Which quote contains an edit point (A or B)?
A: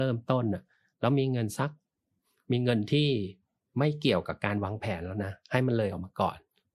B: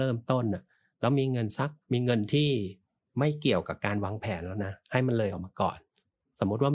B